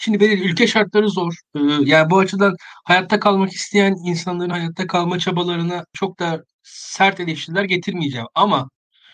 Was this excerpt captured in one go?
yes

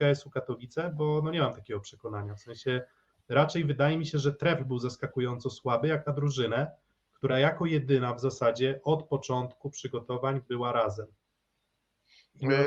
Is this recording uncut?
yes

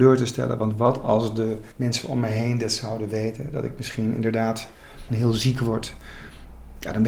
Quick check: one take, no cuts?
no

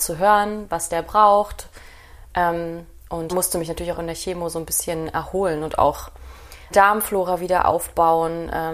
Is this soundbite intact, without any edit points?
no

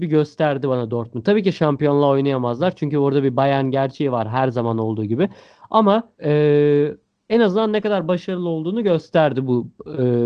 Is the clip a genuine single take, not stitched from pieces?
no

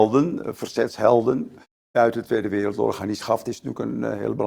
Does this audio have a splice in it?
no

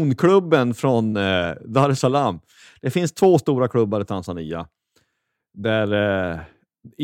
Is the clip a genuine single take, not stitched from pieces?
yes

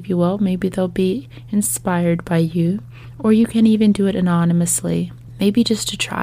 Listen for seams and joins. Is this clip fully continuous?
yes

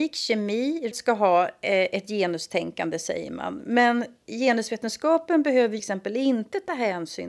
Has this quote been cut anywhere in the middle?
yes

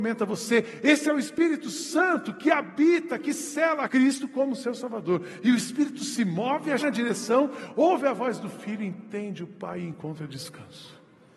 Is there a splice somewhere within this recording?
yes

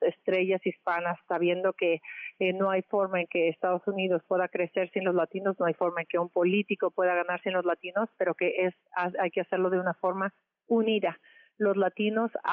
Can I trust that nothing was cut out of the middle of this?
yes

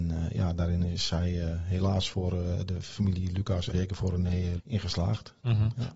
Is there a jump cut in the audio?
yes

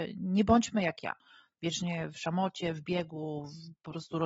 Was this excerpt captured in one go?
yes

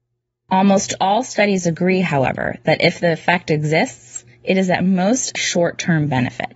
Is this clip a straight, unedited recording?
no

